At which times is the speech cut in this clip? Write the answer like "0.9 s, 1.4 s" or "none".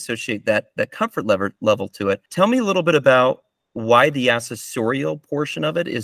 2.3 s